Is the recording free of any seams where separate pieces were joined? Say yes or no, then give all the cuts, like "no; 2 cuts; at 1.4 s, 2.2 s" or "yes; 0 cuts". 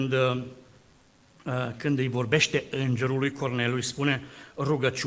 yes; 0 cuts